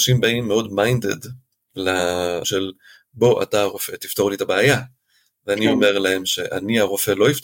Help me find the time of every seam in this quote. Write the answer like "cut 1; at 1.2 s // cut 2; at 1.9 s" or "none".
cut 1; at 2.4 s